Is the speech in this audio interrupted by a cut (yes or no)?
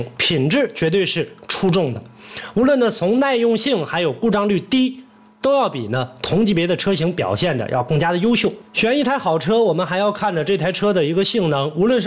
no